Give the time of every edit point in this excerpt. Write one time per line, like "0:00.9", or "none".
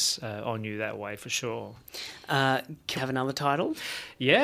0:03.0